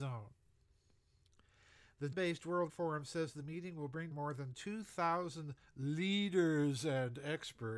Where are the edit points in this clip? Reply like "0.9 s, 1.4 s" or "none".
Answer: 2.1 s, 2.7 s, 4.1 s